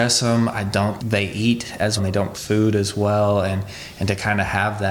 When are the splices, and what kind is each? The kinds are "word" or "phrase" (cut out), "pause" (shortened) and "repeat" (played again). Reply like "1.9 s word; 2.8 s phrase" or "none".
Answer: 1.0 s word; 2.0 s word; 2.3 s word